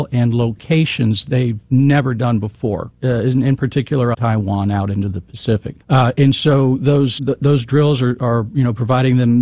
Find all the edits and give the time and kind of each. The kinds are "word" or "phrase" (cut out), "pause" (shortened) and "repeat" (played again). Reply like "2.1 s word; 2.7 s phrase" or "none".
4.1 s phrase; 5.8 s pause; 7.2 s word